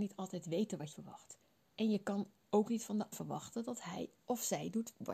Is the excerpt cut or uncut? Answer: cut